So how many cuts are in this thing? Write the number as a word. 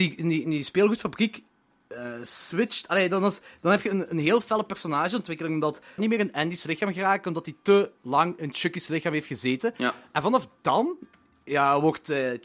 one